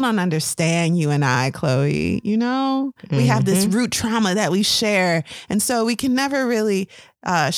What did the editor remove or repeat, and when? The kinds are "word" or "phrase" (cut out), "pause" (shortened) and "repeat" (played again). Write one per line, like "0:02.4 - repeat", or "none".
none

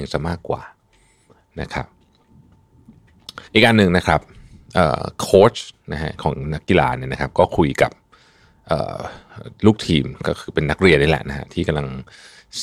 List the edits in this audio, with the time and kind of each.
0:03.5 - pause

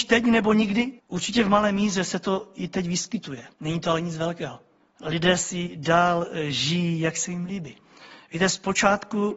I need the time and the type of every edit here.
0:01.0 - pause
0:03.5 - pause
0:04.8 - pause

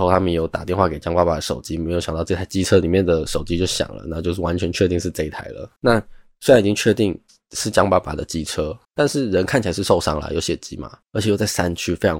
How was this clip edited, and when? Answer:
0:05.8 - pause
0:08.8 - pause
0:11.0 - pause

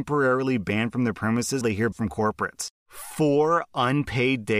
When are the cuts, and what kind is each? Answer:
0:01.6 - word
0:01.9 - word

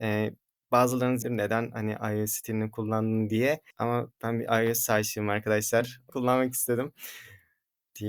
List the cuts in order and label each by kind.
0:01.2 - phrase
0:03.7 - pause
0:06.1 - phrase

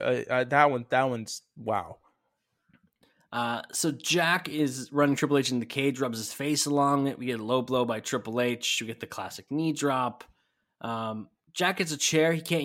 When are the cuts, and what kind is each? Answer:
none

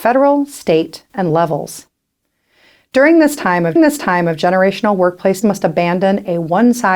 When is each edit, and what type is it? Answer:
0:01.3 - word
0:03.8 - repeat
0:05.4 - phrase

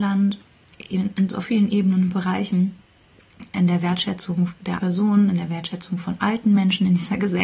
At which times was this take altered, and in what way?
0:01.4 - word
0:04.8 - word

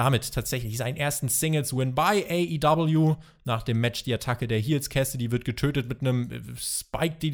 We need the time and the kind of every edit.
none

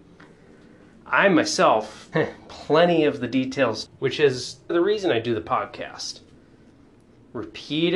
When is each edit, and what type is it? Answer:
0:02.1 - word
0:03.8 - word
0:04.7 - word

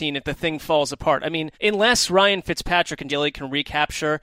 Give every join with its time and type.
0:01.5 - pause
0:03.1 - word

